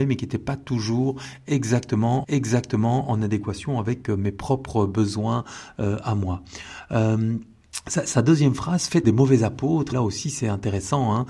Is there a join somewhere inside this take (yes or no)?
yes